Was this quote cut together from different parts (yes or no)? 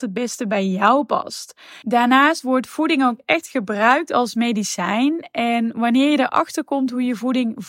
no